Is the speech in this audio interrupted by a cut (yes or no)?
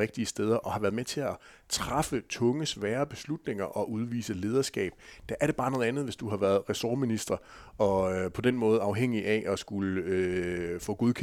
no